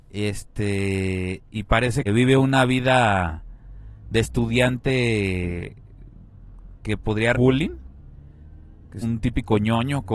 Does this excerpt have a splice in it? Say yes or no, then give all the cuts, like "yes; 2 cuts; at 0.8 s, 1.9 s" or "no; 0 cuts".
yes; 3 cuts; at 2.1 s, 7.3 s, 9.0 s